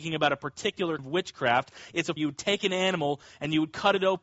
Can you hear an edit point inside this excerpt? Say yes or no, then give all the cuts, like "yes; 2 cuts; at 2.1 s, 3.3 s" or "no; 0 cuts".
yes; 2 cuts; at 1.0 s, 2.2 s